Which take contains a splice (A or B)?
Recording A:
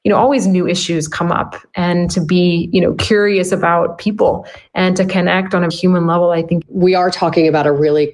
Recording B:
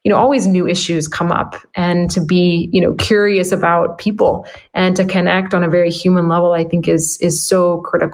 A